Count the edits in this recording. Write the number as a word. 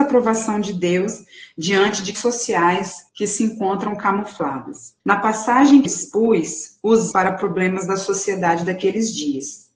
five